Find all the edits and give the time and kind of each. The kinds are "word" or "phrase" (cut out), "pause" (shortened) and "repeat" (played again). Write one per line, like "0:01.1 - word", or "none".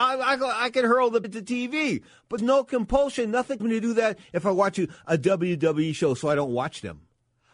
0:01.2 - word
0:02.4 - word
0:03.6 - word